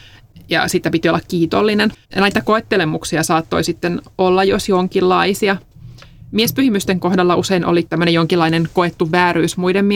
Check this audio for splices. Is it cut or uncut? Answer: cut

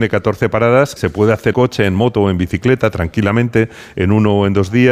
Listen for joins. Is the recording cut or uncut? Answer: cut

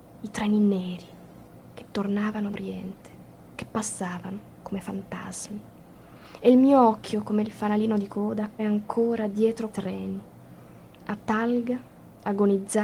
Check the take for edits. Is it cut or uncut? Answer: cut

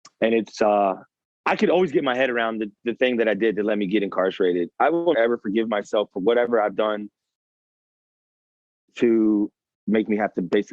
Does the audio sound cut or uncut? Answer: cut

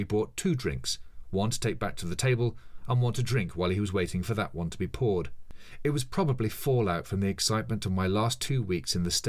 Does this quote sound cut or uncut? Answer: uncut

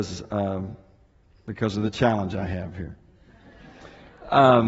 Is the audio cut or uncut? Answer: uncut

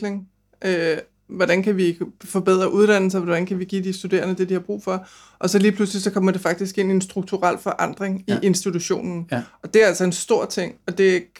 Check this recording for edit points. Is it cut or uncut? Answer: uncut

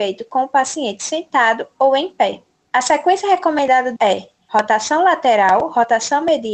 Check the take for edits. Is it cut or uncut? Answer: cut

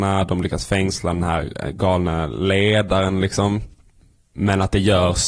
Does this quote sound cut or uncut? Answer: uncut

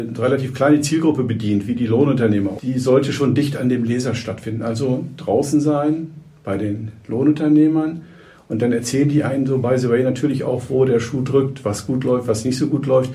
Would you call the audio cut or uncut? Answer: uncut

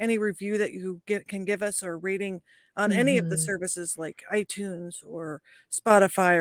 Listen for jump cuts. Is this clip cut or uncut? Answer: uncut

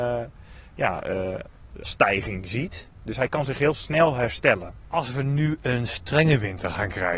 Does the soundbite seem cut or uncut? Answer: cut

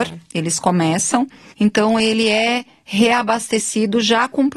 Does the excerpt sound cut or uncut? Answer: uncut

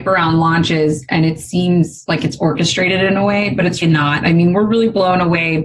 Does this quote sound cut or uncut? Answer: cut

